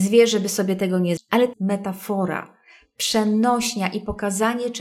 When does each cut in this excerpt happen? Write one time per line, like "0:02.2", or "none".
0:01.2
0:01.5